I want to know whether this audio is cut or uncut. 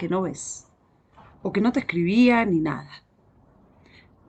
uncut